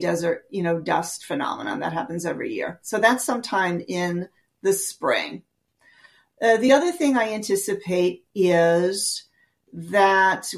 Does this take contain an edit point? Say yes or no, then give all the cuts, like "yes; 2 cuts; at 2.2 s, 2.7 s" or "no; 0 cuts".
no; 0 cuts